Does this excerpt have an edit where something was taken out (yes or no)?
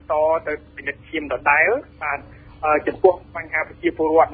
yes